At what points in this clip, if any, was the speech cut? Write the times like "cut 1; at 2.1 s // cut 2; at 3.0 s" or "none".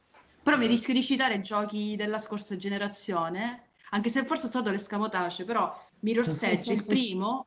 cut 1; at 5.9 s